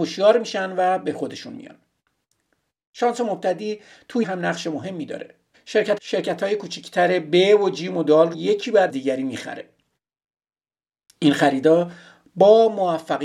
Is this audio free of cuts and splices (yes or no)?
no